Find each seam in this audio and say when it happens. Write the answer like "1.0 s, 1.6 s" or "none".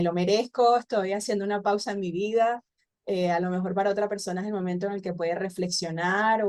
none